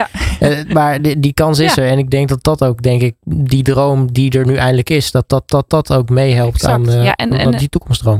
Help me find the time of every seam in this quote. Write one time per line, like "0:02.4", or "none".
none